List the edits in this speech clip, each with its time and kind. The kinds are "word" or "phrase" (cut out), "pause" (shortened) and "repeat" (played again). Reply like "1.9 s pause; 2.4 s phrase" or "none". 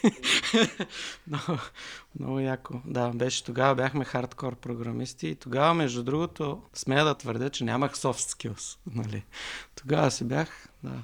6.7 s pause